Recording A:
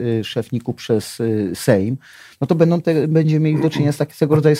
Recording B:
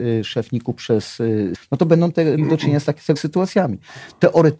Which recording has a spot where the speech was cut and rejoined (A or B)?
B